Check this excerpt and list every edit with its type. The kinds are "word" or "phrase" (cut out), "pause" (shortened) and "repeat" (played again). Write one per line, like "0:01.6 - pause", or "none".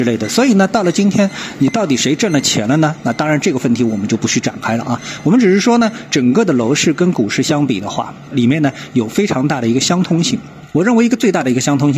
none